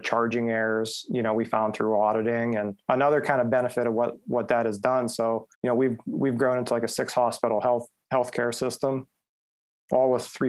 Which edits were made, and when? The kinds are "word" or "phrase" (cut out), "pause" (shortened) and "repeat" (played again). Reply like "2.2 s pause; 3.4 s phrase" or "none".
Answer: 5.5 s pause